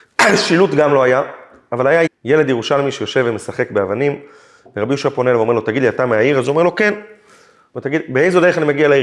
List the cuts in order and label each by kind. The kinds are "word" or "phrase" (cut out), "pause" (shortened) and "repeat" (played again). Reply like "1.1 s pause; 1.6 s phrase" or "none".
2.1 s word